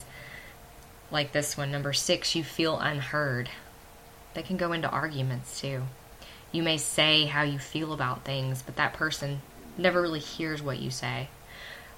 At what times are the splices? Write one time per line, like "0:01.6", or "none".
none